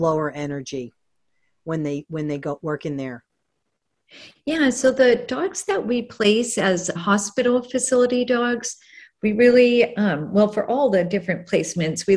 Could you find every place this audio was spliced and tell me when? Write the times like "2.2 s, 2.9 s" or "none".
7.0 s